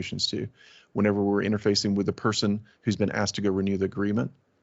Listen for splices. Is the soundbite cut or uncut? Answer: uncut